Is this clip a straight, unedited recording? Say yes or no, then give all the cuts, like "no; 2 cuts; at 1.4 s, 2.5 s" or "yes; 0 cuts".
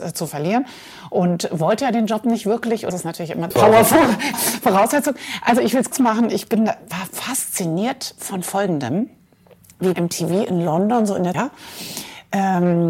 no; 6 cuts; at 2.9 s, 3.5 s, 4.3 s, 5.9 s, 9.9 s, 11.3 s